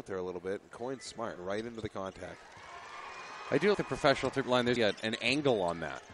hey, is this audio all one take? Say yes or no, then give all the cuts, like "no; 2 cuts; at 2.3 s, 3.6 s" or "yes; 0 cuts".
no; 4 cuts; at 1.4 s, 3.7 s, 4.4 s, 4.8 s